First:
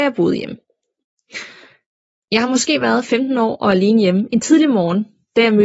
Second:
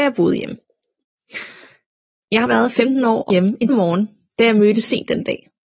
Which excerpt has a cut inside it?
second; 3 cuts; at 2.5 s, 3.3 s, 3.7 s

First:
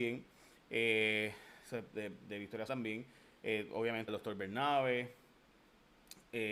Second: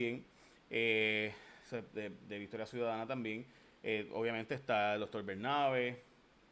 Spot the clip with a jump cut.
first; 2 cuts; at 2.7 s, 4.1 s

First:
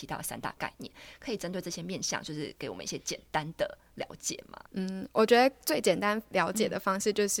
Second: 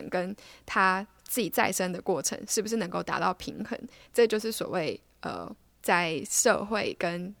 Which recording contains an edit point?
first; 1 cut; at 4.7 s

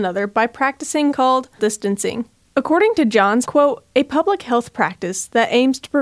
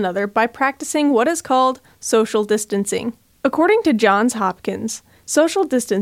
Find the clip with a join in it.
first; 3 cuts; at 1.1 s, 1.6 s, 3.4 s

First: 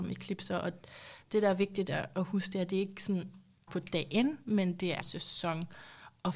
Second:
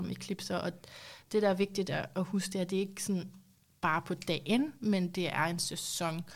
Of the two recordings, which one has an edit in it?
first; 2 cuts; at 3.7 s, 5.0 s

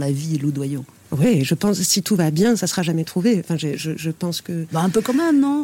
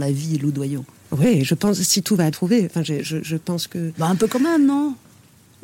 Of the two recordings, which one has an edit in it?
second; 1 cut; at 2.3 s

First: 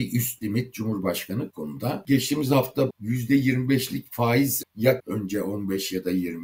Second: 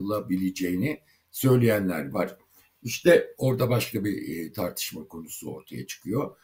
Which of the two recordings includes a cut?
first; 4 cuts; at 1.5 s, 2.9 s, 4.6 s, 5.0 s

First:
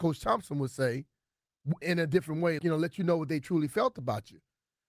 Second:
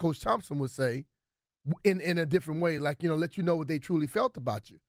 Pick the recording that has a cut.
first; 2 cuts; at 1.8 s, 2.6 s

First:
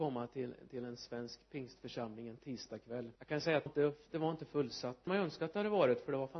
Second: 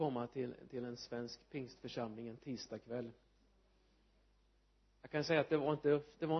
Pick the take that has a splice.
first; 3 cuts; at 3.2 s, 3.7 s, 5.1 s

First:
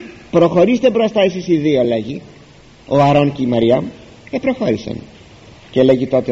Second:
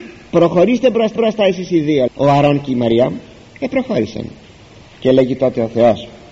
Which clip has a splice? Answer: second; 2 cuts; at 1.2 s, 2.1 s

